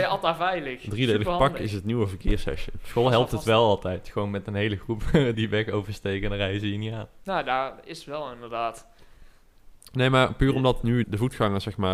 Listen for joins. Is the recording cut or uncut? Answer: cut